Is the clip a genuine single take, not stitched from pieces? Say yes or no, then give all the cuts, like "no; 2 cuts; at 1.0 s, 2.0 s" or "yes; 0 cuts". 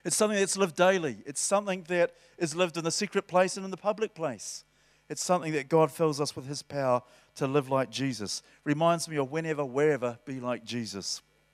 yes; 0 cuts